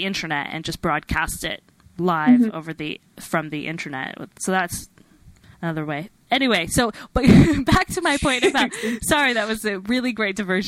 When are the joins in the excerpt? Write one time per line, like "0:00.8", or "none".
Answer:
0:01.8
0:05.5